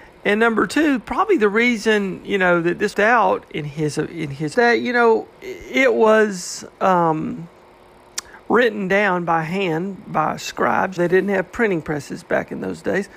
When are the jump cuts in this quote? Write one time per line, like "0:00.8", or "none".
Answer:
0:02.9
0:04.5
0:05.3
0:11.0